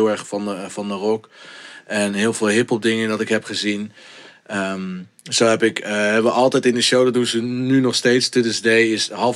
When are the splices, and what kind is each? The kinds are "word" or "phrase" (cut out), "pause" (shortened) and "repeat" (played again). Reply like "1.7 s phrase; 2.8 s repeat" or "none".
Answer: none